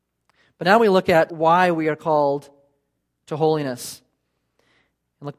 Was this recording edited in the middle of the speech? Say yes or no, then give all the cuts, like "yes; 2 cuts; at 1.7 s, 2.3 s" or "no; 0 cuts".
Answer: yes; 1 cut; at 1.3 s